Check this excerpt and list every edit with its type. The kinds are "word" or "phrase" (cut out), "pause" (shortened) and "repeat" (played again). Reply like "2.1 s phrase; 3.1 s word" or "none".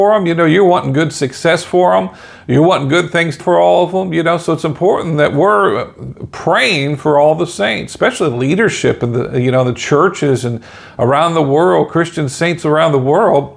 3.4 s word